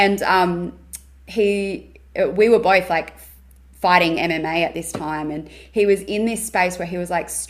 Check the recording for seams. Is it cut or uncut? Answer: uncut